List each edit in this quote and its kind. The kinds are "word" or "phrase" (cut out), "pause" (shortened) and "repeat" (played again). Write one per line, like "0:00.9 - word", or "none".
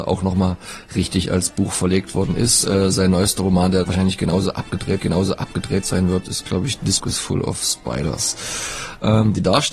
0:03.8 - word
0:05.0 - repeat
0:07.0 - word